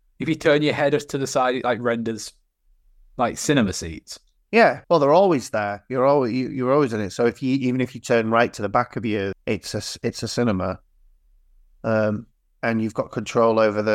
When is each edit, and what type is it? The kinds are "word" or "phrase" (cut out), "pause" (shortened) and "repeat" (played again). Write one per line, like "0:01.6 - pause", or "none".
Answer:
0:04.8 - pause
0:09.3 - word